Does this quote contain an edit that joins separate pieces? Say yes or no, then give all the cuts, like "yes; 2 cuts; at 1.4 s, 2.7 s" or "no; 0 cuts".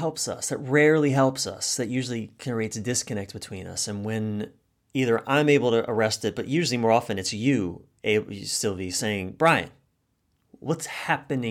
no; 0 cuts